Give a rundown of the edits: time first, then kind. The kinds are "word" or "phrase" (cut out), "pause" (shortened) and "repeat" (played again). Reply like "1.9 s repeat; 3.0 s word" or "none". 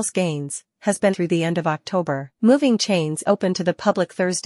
1.1 s word; 2.3 s pause; 3.2 s word